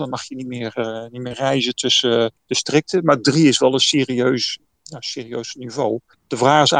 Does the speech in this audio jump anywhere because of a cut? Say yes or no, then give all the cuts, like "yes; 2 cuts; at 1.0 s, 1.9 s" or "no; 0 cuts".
no; 0 cuts